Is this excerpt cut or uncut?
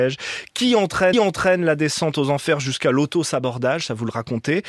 cut